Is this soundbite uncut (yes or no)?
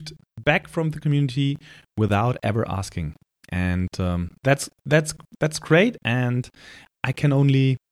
yes